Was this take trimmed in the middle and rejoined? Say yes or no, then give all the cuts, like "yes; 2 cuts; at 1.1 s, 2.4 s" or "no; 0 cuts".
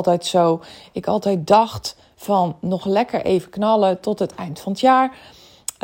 no; 0 cuts